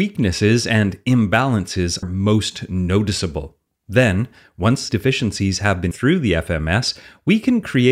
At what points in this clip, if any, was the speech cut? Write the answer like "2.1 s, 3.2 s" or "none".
2.0 s, 4.9 s, 5.9 s